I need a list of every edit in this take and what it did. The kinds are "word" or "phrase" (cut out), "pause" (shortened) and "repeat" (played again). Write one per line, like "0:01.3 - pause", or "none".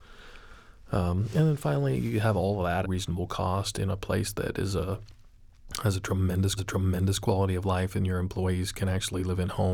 0:02.8 - phrase
0:06.6 - repeat